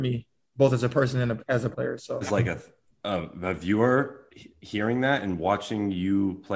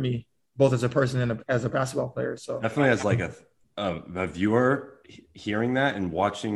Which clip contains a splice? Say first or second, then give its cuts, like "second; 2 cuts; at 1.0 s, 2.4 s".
first; 2 cuts; at 1.7 s, 2.2 s